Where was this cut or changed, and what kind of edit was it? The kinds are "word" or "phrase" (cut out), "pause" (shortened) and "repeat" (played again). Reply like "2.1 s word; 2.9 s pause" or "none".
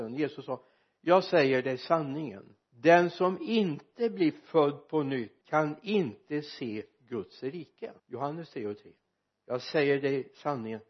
2.6 s pause; 5.4 s pause; 8.0 s pause; 9.3 s pause